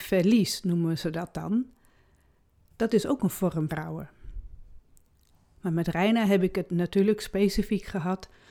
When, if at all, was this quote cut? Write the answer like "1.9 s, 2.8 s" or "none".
3.7 s